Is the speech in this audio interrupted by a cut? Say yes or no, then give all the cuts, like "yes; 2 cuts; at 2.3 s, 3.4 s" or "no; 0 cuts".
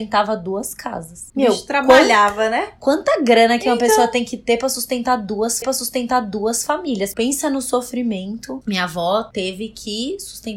yes; 1 cut; at 5.6 s